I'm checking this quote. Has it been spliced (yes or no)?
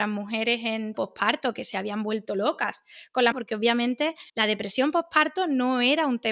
yes